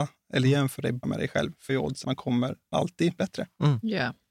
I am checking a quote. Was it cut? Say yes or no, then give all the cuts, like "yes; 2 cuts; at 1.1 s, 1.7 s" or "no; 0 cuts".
yes; 5 cuts; at 1.0 s, 1.7 s, 2.0 s, 2.7 s, 3.2 s